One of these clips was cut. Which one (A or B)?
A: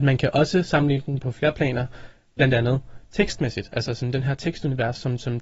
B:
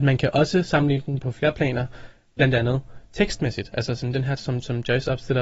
B